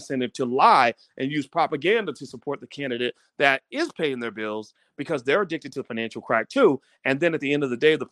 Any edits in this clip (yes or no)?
no